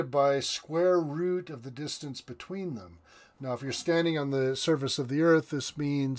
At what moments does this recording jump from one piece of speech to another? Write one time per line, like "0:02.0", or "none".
none